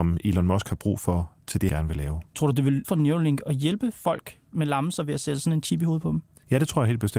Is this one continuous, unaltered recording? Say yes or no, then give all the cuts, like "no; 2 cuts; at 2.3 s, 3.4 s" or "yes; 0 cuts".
no; 3 cuts; at 1.7 s, 2.3 s, 2.8 s